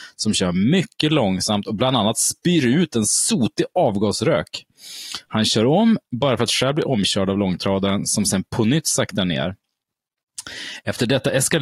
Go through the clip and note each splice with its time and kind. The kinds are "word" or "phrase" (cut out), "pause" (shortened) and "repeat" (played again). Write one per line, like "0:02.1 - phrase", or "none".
none